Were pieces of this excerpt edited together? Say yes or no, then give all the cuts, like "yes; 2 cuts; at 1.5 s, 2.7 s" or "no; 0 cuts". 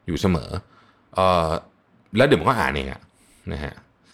no; 0 cuts